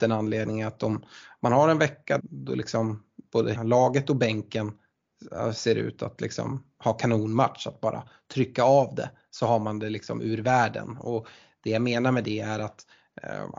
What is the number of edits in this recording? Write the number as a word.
two